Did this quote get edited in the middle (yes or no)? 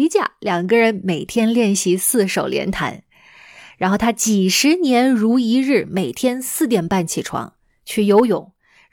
no